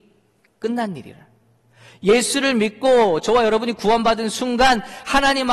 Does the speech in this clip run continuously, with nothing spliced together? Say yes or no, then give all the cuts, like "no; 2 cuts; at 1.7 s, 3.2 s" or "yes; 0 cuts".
yes; 0 cuts